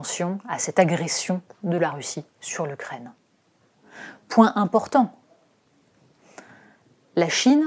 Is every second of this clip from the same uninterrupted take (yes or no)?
yes